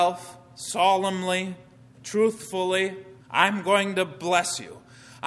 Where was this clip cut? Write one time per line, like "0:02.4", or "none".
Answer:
0:03.2